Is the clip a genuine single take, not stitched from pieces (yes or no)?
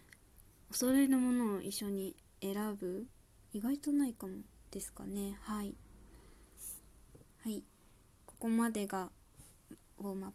yes